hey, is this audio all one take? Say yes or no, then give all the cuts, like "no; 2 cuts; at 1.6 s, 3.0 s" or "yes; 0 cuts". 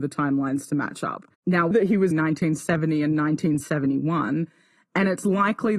no; 3 cuts; at 1.3 s, 1.7 s, 2.1 s